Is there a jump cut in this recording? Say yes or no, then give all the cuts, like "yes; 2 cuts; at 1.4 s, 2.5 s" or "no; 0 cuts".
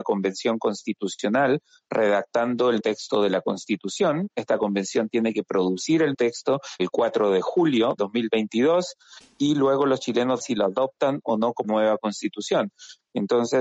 yes; 6 cuts; at 2.8 s, 6.1 s, 6.8 s, 8.0 s, 10.4 s, 11.6 s